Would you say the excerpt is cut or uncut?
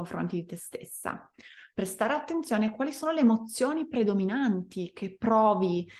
uncut